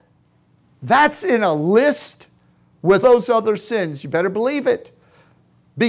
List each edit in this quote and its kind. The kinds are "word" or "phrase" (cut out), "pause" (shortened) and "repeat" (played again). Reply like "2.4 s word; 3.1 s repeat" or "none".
3.0 s phrase